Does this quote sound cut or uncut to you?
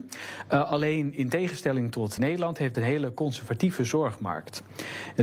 cut